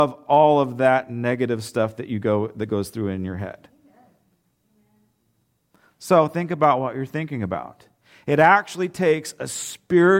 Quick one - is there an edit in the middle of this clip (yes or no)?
no